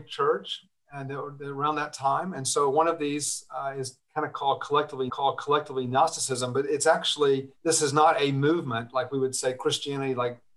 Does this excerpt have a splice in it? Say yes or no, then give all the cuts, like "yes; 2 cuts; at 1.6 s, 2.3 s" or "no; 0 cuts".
yes; 2 cuts; at 5.1 s, 7.6 s